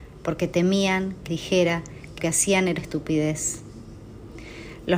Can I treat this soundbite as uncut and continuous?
no; 3 cuts; at 1.3 s, 2.2 s, 2.8 s

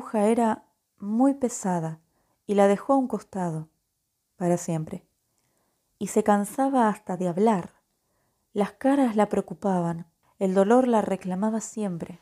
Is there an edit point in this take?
no; 0 cuts

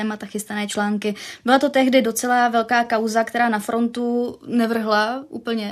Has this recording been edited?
no; 0 cuts

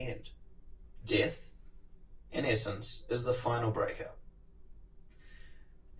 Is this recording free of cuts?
yes; 0 cuts

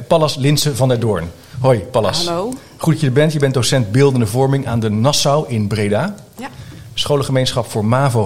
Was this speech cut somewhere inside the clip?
no; 0 cuts

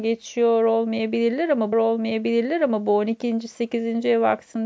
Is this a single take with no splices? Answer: no; 1 cut; at 1.7 s

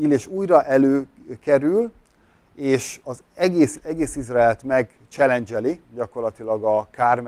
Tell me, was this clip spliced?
yes; 3 cuts; at 3.0 s, 3.7 s, 5.8 s

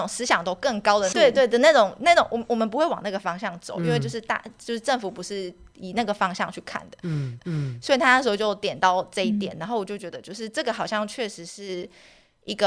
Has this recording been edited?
yes; 2 cuts; at 1.1 s, 7.4 s

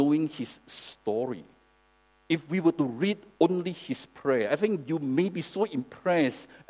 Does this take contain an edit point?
no; 0 cuts

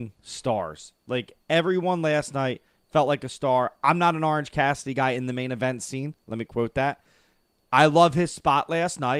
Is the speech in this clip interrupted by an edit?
no; 0 cuts

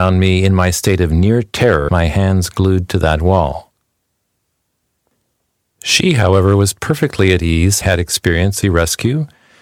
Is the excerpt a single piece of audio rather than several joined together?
no; 3 cuts; at 1.9 s, 7.8 s, 8.6 s

